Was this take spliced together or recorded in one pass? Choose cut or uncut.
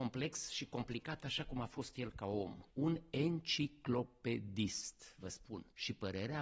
uncut